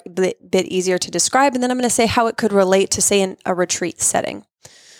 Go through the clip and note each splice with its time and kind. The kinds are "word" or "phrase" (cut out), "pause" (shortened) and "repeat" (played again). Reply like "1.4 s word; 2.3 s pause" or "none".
none